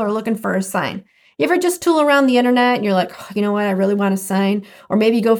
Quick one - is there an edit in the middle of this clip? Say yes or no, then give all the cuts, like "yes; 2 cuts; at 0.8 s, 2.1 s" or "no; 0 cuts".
no; 0 cuts